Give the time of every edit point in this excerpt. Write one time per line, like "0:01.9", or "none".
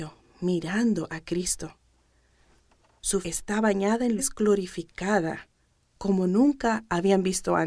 0:03.2
0:04.2

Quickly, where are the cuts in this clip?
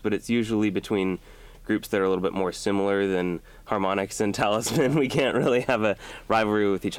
none

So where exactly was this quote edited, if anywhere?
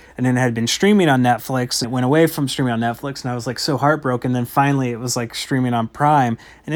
0:01.8

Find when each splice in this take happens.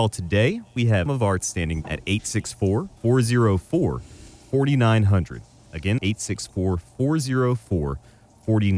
0:01.1
0:01.4
0:01.8
0:03.0
0:06.0

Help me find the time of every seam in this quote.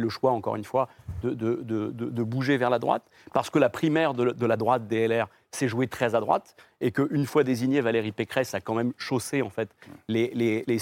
none

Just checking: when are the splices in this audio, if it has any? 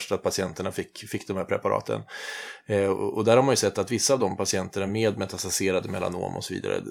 none

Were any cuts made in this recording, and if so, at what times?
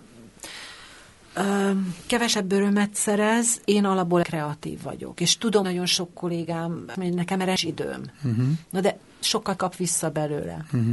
0:03.6
0:04.2
0:05.6
0:06.9
0:07.6
0:09.6

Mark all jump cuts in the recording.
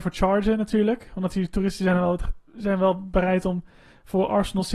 0:02.5

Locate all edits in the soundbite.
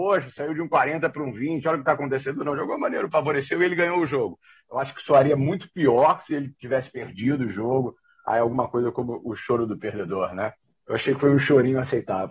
none

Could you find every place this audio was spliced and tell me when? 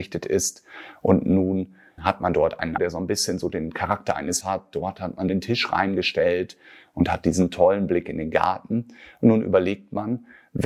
0:02.0
0:02.8
0:04.4
0:05.3

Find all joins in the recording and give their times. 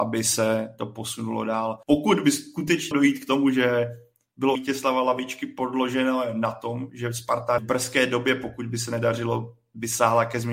0:01.8
0:02.9
0:04.5
0:07.6

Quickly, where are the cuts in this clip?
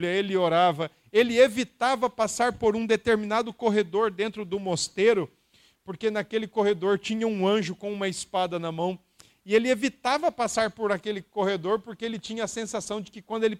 none

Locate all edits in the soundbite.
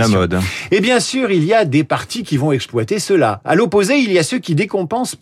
none

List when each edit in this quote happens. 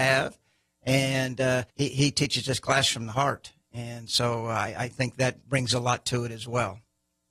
0:01.7

